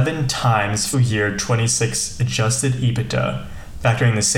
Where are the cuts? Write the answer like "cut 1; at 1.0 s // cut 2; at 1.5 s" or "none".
cut 1; at 0.9 s